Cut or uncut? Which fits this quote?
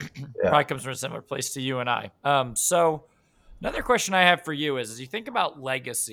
uncut